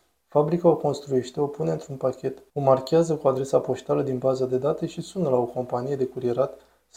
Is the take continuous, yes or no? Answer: no